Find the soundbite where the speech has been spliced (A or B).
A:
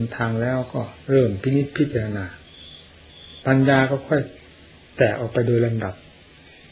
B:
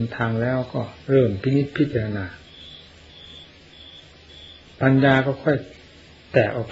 A